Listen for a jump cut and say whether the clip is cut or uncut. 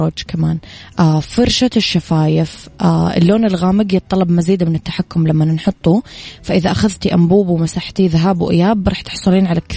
uncut